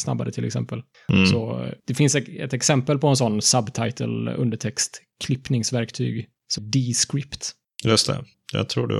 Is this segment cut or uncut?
cut